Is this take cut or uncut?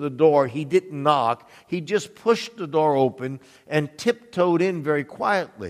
uncut